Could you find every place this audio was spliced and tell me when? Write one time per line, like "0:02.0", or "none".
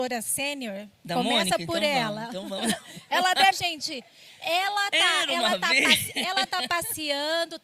0:03.5